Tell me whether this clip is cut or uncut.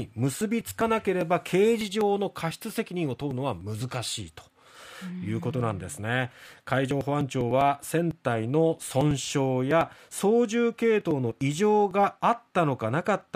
uncut